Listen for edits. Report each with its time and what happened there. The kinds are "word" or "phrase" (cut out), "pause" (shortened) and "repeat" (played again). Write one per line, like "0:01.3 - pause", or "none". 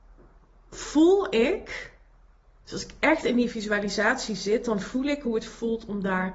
none